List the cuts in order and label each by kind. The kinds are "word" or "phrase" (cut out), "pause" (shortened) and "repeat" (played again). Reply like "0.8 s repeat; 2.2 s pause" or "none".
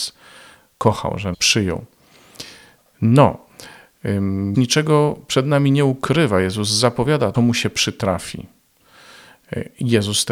1.3 s word; 4.5 s word; 7.3 s word